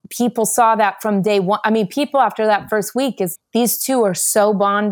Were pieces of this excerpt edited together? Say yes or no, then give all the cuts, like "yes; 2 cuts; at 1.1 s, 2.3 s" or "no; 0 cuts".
yes; 1 cut; at 3.4 s